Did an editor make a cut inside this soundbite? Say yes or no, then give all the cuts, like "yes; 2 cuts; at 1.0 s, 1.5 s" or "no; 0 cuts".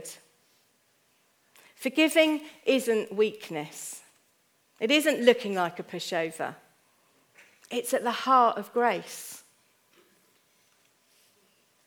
no; 0 cuts